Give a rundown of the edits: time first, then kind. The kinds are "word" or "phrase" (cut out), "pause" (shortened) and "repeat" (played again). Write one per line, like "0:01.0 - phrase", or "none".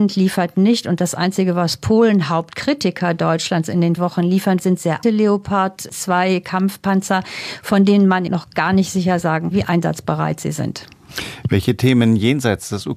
0:04.0 - word
0:04.6 - word
0:05.0 - word
0:08.3 - word
0:09.5 - word